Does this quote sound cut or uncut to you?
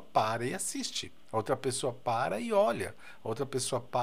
uncut